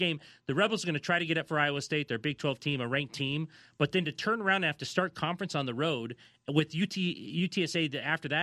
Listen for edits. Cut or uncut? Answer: uncut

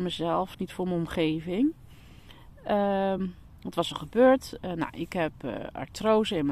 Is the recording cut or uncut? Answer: uncut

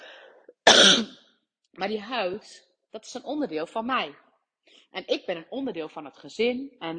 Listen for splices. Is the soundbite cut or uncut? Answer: uncut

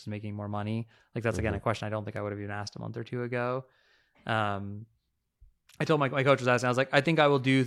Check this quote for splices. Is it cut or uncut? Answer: uncut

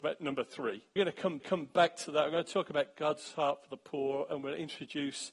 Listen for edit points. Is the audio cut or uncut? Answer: cut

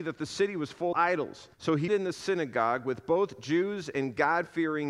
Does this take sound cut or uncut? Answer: cut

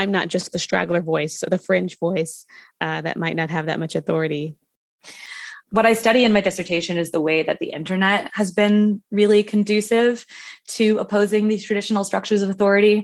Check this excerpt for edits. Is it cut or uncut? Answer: uncut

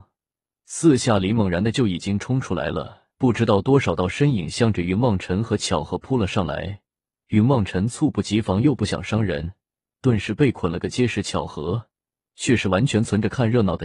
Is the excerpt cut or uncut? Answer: cut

